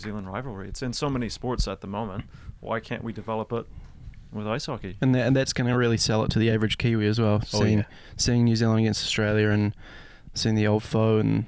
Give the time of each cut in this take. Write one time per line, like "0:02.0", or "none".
none